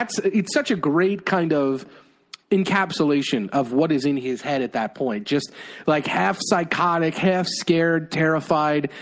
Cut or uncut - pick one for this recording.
uncut